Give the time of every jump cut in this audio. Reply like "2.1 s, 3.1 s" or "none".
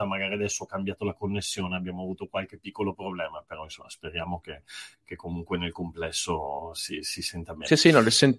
none